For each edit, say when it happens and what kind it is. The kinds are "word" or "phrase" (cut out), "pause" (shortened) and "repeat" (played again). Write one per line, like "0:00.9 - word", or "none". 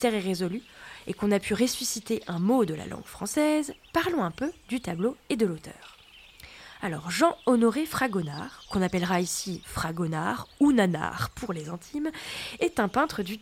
0:09.6 - word